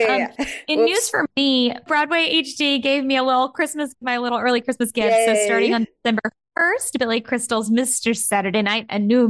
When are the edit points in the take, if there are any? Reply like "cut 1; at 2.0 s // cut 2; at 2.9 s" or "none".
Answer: cut 1; at 3.9 s